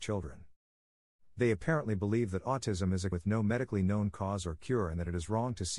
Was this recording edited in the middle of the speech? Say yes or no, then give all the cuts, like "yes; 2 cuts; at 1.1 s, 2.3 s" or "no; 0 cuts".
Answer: yes; 1 cut; at 3.1 s